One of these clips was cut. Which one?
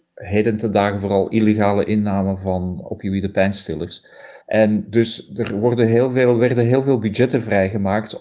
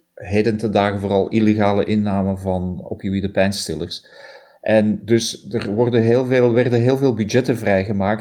first; 1 cut; at 4.4 s

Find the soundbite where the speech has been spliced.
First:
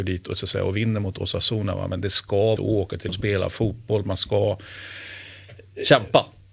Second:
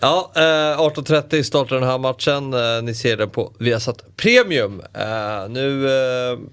first; 2 cuts; at 2.6 s, 3.1 s

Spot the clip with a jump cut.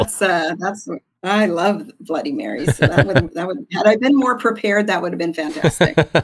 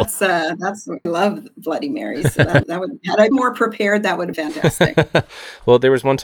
second; 4 cuts; at 1.1 s, 2.6 s, 3.3 s, 4.3 s

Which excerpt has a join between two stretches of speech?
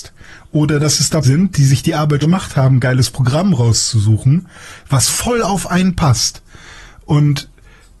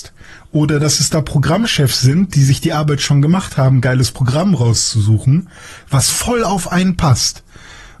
first; 2 cuts; at 1.2 s, 2.2 s

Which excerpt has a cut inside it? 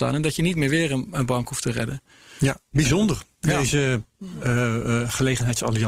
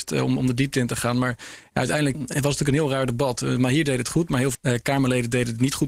second; 2 cuts; at 2.1 s, 4.5 s

